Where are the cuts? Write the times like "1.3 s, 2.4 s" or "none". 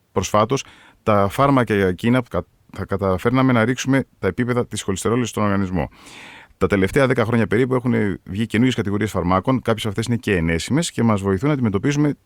2.2 s, 4.1 s